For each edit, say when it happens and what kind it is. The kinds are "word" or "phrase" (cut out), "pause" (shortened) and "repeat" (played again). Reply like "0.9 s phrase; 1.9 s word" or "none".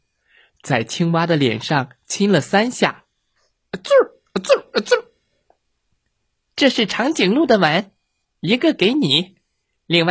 none